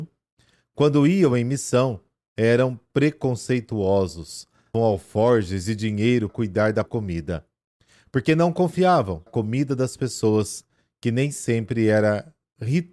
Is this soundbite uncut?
no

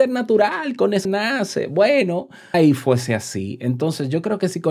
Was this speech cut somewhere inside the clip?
yes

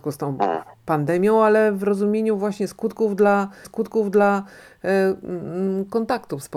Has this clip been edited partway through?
yes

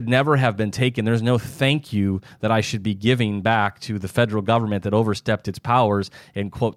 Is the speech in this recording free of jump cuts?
yes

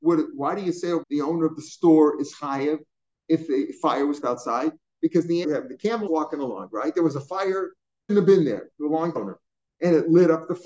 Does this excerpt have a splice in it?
yes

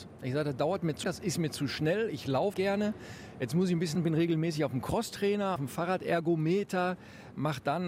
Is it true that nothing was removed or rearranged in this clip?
no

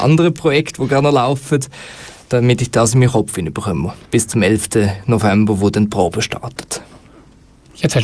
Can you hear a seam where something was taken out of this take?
no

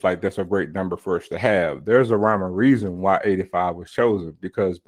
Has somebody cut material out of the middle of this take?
no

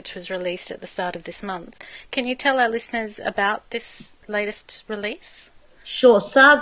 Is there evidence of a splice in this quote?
no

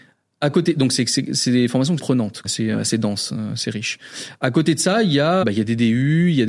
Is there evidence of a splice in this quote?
yes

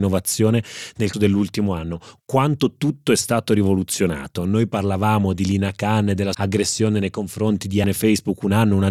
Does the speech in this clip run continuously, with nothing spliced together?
no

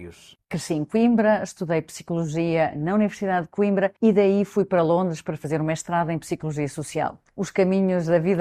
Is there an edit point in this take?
yes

